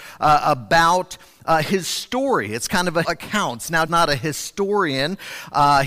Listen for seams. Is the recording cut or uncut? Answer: cut